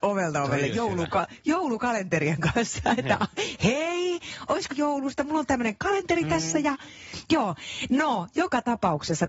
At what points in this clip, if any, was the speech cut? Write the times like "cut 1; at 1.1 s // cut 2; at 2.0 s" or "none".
cut 1; at 4.7 s